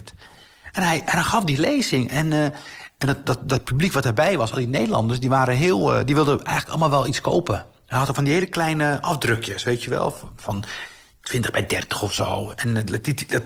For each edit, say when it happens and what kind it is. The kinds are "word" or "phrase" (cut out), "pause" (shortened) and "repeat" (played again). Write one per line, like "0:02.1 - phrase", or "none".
none